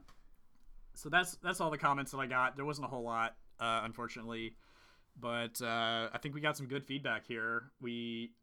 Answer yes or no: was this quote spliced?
no